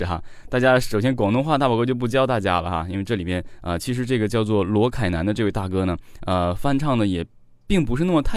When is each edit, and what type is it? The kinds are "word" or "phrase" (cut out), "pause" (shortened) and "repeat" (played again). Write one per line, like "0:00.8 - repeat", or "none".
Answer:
none